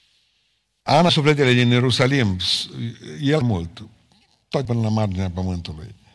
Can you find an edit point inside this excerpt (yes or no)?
yes